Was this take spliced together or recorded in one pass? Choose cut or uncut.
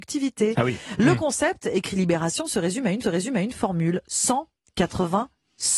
cut